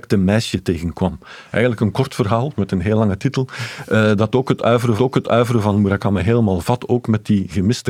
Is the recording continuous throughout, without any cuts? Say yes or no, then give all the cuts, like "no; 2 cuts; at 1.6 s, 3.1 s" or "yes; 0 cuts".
no; 1 cut; at 5.0 s